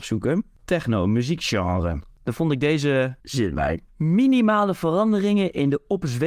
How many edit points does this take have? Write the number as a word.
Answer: two